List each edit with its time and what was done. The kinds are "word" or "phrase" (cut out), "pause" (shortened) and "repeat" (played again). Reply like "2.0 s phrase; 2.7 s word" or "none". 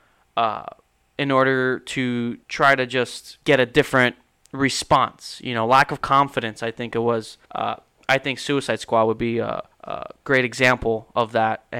2.4 s pause; 3.4 s pause; 7.4 s pause; 9.7 s pause